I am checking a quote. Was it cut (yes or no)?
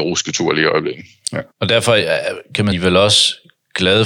yes